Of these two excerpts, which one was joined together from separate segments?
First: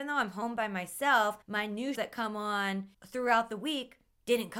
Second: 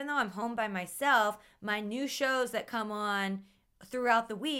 first; 3 cuts; at 1.4 s, 1.9 s, 2.9 s

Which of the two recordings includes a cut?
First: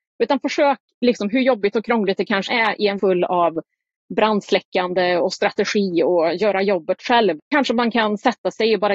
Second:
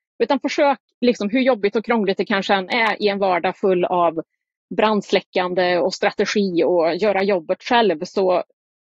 first; 3 cuts; at 2.5 s, 3.0 s, 7.4 s

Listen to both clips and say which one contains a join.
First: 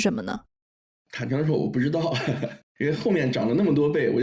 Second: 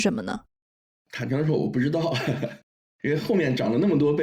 first; 1 cut; at 2.7 s

